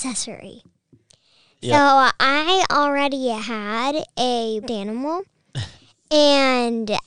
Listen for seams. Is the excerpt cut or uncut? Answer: cut